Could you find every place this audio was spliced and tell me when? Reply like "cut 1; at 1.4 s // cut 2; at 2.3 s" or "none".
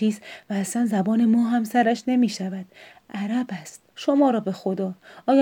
cut 1; at 3.9 s